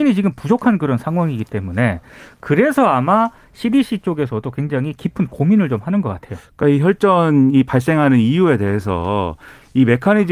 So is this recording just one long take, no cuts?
yes; 0 cuts

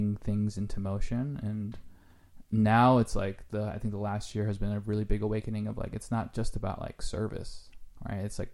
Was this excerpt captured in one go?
yes; 0 cuts

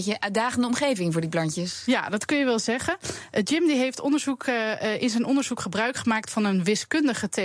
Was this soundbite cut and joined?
no; 0 cuts

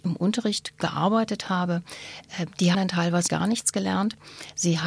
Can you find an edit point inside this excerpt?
yes; 2 cuts; at 2.7 s, 3.3 s

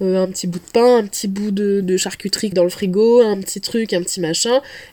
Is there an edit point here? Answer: yes; 2 cuts; at 1.8 s, 2.5 s

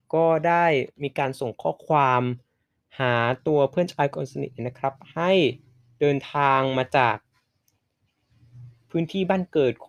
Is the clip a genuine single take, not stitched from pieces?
yes; 0 cuts

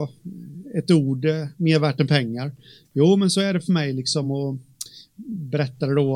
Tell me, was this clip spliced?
no; 0 cuts

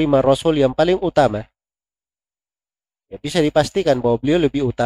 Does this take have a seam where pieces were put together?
no; 0 cuts

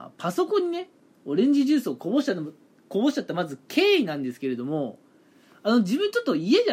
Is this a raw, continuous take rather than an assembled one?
yes; 0 cuts

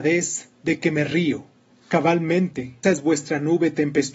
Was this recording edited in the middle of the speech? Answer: yes; 1 cut; at 2.8 s

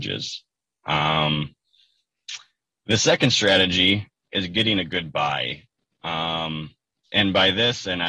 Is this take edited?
yes; 1 cut; at 4.2 s

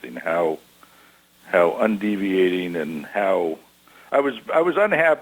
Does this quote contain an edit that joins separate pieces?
no; 0 cuts

